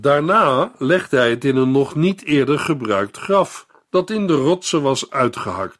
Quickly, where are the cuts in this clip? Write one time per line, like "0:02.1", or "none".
none